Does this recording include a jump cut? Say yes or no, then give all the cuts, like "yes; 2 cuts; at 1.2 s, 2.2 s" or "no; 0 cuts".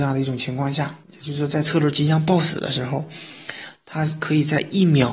yes; 1 cut; at 1.0 s